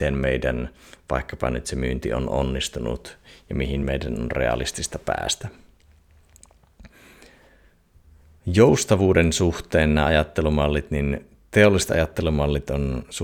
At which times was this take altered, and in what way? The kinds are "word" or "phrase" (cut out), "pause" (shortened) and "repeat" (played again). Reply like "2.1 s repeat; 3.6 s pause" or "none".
none